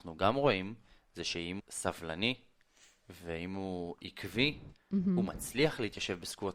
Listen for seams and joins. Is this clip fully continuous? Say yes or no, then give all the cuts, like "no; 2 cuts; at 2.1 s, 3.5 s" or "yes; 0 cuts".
no; 1 cut; at 1.6 s